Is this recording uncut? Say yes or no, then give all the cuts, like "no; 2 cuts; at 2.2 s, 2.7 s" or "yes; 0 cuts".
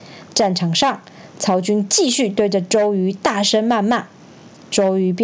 yes; 0 cuts